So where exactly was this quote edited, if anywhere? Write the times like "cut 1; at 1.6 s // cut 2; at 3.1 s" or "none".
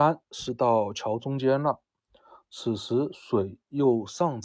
none